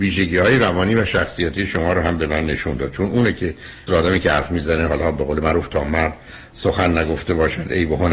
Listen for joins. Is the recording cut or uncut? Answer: cut